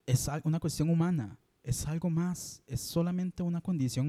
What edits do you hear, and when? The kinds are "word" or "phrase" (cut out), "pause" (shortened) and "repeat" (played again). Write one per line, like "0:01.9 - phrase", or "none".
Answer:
none

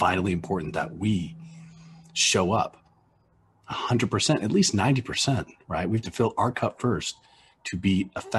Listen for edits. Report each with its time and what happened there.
none

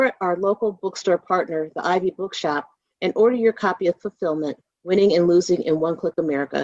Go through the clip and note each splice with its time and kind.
none

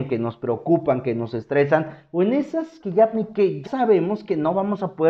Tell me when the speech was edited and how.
0:02.8 - word
0:03.1 - word
0:03.6 - word

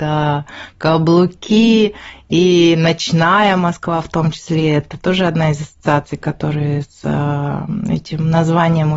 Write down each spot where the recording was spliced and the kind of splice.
none

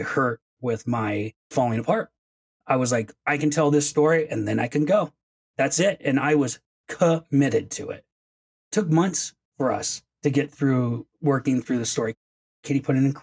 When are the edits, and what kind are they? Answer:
none

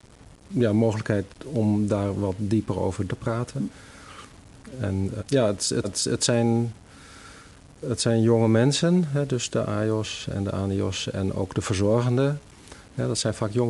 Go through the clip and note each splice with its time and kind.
0:03.1 - word
0:05.2 - word
0:05.8 - repeat

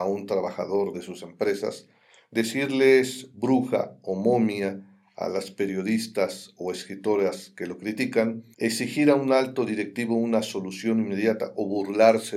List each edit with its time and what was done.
0:00.9 - word

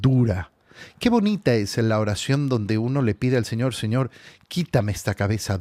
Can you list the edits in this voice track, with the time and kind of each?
none

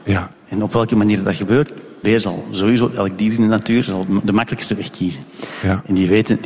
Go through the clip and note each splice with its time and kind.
0:02.0 - word

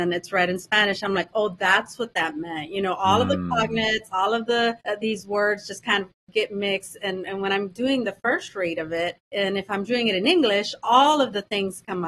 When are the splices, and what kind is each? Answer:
0:04.8 - pause
0:09.2 - pause

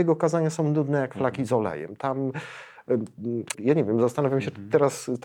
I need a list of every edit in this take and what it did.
0:03.5 - phrase

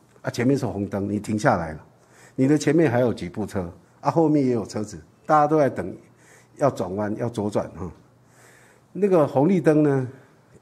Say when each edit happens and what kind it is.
none

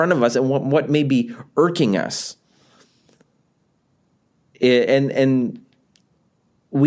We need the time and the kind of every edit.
none

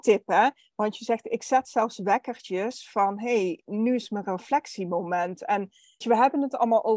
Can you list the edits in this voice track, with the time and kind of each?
0:06.0 - word

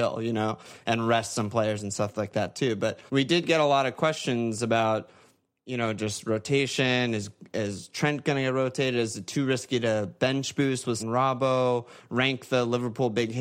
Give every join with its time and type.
0:03.1 - pause
0:11.0 - phrase

